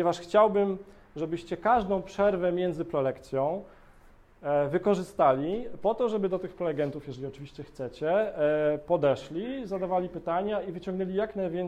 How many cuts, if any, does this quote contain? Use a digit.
0